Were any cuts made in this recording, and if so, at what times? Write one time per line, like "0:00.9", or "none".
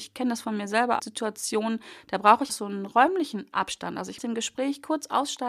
0:01.0
0:02.5
0:04.2